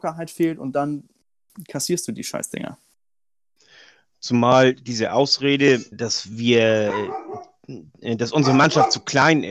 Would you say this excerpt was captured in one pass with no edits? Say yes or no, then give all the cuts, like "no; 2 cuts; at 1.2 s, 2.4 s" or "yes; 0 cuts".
no; 1 cut; at 5.9 s